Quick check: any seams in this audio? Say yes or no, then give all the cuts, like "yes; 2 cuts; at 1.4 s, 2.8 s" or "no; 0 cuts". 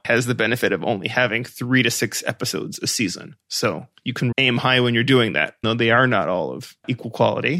yes; 2 cuts; at 4.3 s, 5.6 s